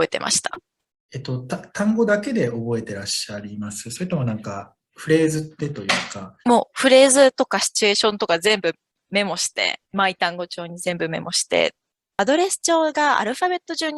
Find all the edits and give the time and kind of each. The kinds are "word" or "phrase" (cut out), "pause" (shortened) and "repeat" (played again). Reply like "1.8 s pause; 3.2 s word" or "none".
6.4 s pause; 9.8 s pause; 12.1 s phrase